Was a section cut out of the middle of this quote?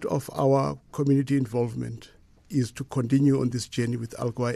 no; 0 cuts

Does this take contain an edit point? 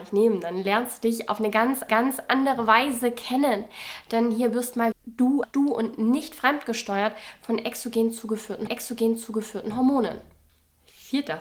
yes; 4 cuts; at 1.9 s, 4.9 s, 5.4 s, 8.7 s

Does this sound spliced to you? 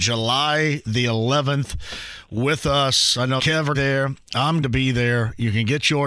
yes; 3 cuts; at 3.4 s, 3.7 s, 4.6 s

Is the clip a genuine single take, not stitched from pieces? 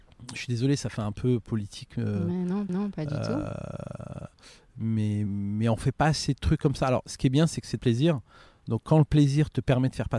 no; 3 cuts; at 2.7 s, 5.3 s, 7.8 s

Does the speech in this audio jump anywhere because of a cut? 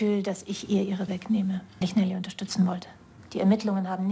yes; 2 cuts; at 1.1 s, 1.8 s

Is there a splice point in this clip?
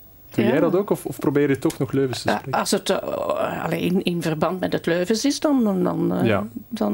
no; 0 cuts

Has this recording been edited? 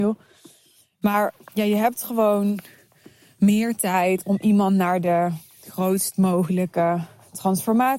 no; 0 cuts

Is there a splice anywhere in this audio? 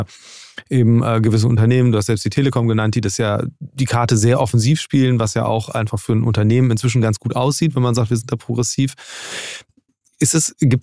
no; 0 cuts

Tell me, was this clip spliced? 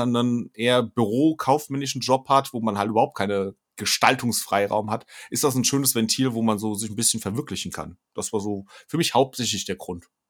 yes; 1 cut; at 3.6 s

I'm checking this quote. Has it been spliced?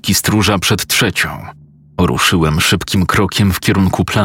yes; 1 cut; at 1.6 s

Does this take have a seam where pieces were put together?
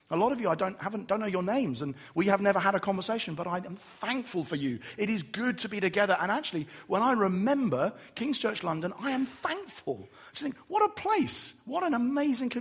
no; 0 cuts

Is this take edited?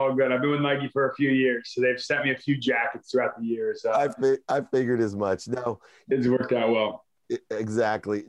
yes; 1 cut; at 6.1 s

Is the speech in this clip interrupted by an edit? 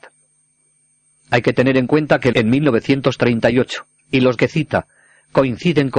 yes; 3 cuts; at 2.3 s, 4.0 s, 4.4 s

